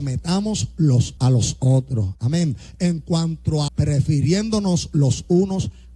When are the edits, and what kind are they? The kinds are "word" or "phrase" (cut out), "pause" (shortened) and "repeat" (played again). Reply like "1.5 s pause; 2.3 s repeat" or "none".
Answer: 1.2 s word; 3.7 s word

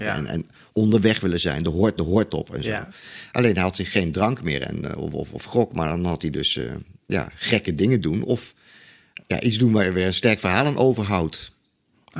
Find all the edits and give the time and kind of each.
2.0 s repeat; 9.2 s word

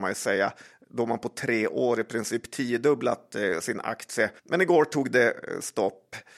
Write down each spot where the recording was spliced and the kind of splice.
4.4 s pause

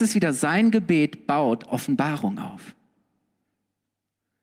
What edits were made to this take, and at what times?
1.7 s word

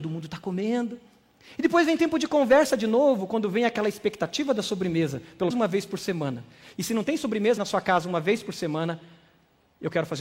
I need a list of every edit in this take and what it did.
5.5 s word; 7.6 s word

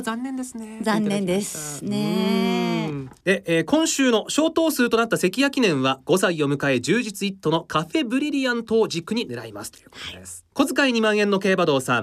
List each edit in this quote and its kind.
10.5 s pause

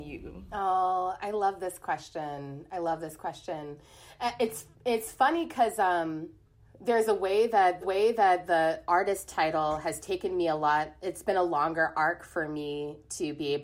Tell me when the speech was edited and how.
7.8 s repeat

